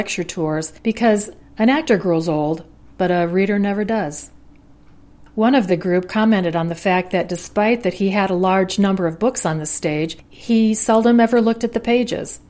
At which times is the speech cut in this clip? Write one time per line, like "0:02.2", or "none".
none